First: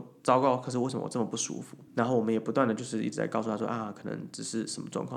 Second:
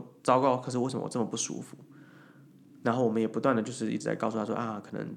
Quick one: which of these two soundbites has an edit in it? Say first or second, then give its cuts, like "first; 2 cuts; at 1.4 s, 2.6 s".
first; 1 cut; at 1.9 s